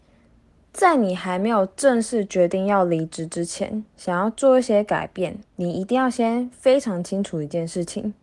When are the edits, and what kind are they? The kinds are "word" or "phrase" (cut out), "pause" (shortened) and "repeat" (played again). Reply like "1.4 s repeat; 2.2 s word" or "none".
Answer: 3.9 s pause; 5.4 s pause

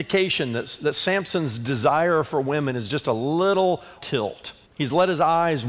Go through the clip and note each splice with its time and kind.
4.0 s word; 4.7 s pause

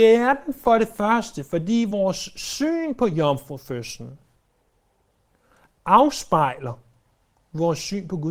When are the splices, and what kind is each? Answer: none

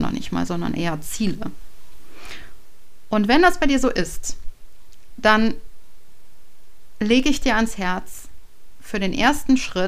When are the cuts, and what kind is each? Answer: none

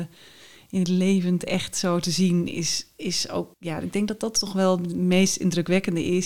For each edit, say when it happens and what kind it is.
3.5 s pause

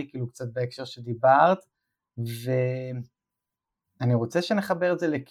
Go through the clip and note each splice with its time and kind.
none

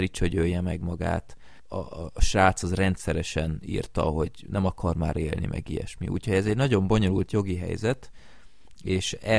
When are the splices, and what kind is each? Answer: none

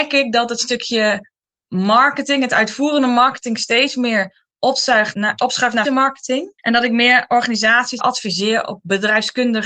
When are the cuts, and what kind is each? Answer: 5.1 s word; 5.8 s word; 6.6 s pause; 8.0 s word

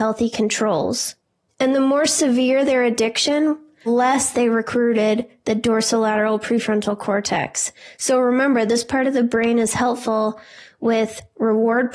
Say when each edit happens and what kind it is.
3.9 s word

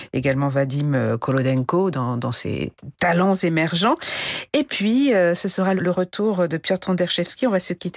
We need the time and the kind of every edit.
5.8 s word

